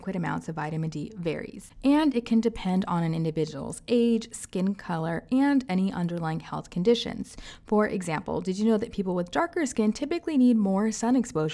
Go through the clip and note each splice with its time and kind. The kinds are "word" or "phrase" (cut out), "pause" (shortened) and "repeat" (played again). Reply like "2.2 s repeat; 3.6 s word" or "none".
none